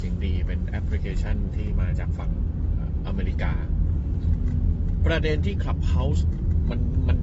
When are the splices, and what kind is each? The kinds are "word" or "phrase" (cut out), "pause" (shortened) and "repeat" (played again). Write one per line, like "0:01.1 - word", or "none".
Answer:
none